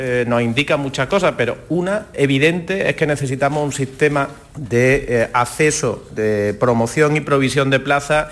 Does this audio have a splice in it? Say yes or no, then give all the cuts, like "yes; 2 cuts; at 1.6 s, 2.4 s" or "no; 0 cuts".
no; 0 cuts